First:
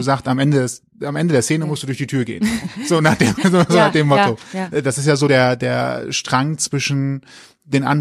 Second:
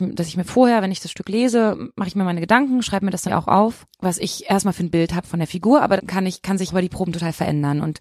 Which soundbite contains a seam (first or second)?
second